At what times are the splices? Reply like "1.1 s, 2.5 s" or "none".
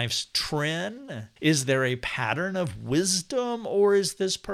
1.4 s

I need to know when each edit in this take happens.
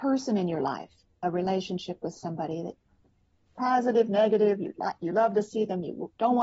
3.5 s

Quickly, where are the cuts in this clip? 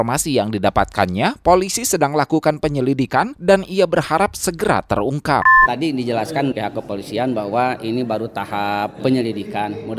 6.5 s

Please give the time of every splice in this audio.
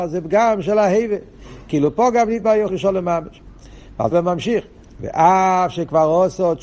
2.7 s, 4.1 s

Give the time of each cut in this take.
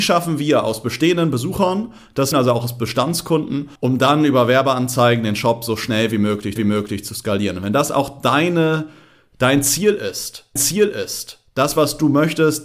2.3 s, 3.8 s, 6.6 s, 10.6 s

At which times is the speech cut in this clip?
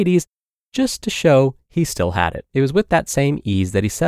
2.5 s

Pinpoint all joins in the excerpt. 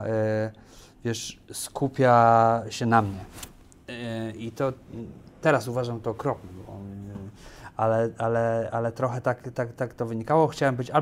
none

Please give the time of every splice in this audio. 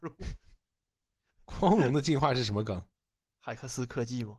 2.9 s

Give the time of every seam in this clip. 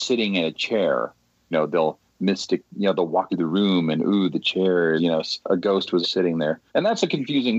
1.5 s, 3.3 s, 5.0 s, 5.4 s, 6.0 s, 6.7 s

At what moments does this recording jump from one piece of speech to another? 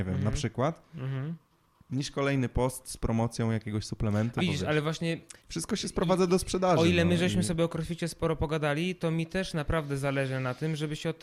4.4 s, 5.4 s

